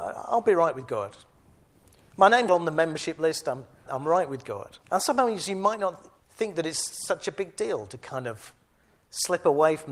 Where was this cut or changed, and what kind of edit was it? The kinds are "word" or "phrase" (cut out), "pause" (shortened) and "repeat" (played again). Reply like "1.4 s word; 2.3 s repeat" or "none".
2.5 s word; 3.9 s word; 4.8 s pause; 6.2 s pause

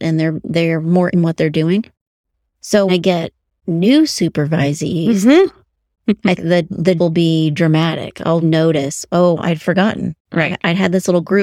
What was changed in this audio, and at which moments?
1.1 s word; 2.9 s word; 6.4 s word; 7.0 s word; 8.4 s word; 9.4 s word

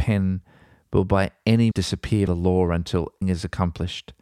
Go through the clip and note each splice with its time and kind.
1.7 s word; 2.3 s word; 3.2 s word

